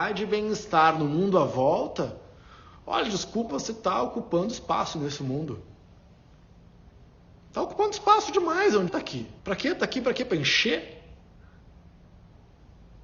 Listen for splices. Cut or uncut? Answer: cut